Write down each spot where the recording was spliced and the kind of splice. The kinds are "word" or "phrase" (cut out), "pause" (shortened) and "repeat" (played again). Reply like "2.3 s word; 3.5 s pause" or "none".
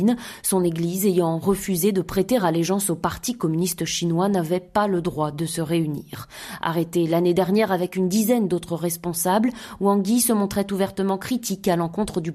none